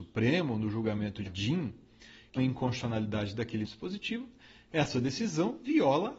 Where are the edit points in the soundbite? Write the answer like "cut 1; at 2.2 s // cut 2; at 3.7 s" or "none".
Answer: cut 1; at 1.3 s // cut 2; at 2.4 s // cut 3; at 3.6 s